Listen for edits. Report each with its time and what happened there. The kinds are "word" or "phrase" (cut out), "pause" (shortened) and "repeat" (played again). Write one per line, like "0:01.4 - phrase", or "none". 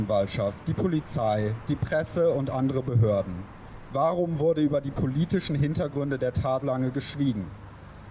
0:06.6 - word

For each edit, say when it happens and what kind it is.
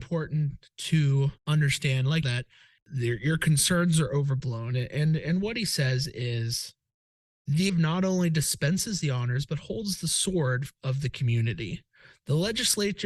0:01.4 - pause
0:02.2 - phrase
0:07.7 - word

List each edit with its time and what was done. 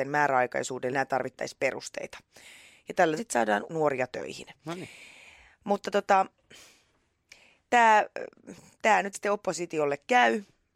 0:00.9 - word
0:03.2 - word
0:03.7 - word
0:09.1 - word

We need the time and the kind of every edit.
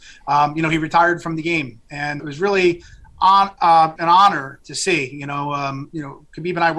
0:02.2 - word
0:04.0 - word

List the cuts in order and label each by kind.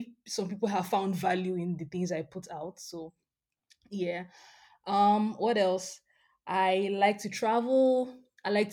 none

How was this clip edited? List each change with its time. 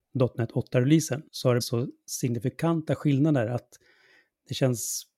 0:01.3 - pause
0:01.6 - word

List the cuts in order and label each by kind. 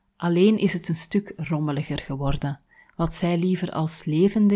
none

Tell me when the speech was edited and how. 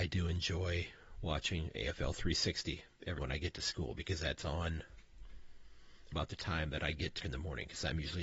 0:03.2 - word
0:06.1 - word
0:07.2 - word

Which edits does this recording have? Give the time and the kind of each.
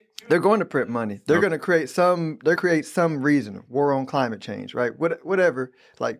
0:02.6 - phrase

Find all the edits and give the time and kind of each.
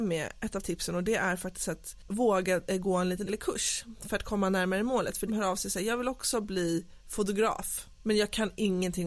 0:03.3 - word
0:05.3 - phrase

